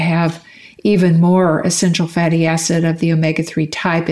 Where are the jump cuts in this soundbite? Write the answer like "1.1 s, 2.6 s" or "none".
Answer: none